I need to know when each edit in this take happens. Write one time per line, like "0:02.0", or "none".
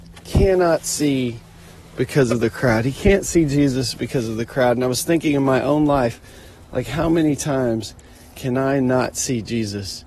none